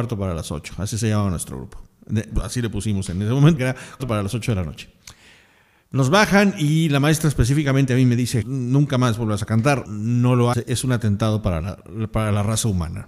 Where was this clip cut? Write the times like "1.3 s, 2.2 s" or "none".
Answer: 3.6 s, 4.0 s, 8.4 s, 9.8 s, 10.5 s, 11.6 s